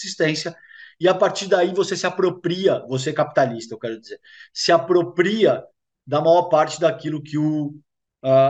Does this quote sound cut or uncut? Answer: uncut